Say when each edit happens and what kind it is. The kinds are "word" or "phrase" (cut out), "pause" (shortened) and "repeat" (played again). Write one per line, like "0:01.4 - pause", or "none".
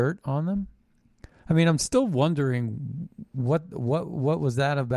none